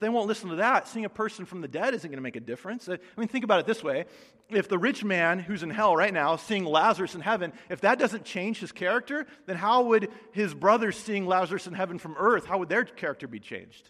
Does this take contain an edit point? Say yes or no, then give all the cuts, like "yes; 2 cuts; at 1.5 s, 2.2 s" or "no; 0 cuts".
no; 0 cuts